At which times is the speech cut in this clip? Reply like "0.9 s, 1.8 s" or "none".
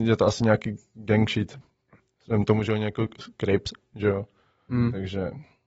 none